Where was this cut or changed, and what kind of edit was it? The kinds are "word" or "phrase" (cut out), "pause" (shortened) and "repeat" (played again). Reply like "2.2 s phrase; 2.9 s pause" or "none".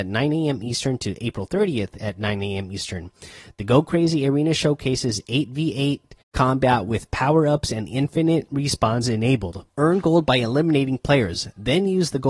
6.2 s pause; 9.7 s pause